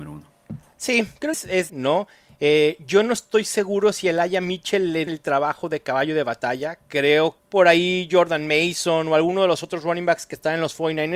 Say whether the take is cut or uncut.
cut